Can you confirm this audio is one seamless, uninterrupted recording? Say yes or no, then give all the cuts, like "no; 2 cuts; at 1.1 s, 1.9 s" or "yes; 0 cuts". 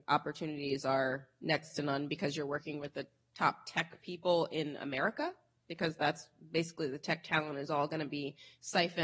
yes; 0 cuts